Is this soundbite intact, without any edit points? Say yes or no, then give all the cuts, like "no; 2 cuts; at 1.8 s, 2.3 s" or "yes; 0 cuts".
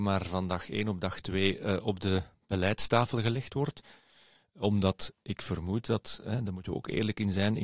yes; 0 cuts